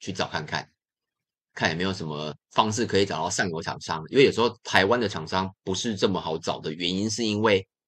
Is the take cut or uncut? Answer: cut